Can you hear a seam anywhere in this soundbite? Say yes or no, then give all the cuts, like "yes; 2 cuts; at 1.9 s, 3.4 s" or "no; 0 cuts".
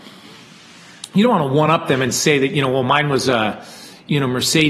no; 0 cuts